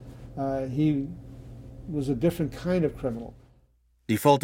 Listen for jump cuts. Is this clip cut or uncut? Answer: uncut